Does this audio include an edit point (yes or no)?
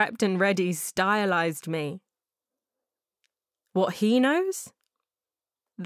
no